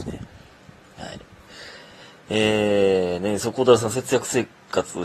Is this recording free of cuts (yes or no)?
yes